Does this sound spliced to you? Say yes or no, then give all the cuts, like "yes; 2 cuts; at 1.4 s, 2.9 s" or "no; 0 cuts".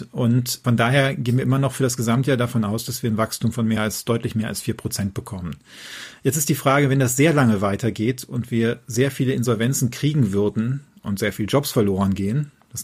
no; 0 cuts